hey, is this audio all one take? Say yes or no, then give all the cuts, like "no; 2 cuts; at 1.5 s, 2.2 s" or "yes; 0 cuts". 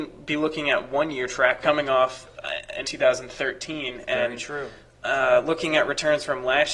no; 2 cuts; at 1.6 s, 2.8 s